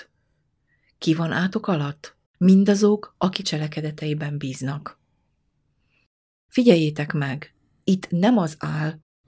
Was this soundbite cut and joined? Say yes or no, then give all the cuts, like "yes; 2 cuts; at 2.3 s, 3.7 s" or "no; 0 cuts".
yes; 2 cuts; at 2.3 s, 3.4 s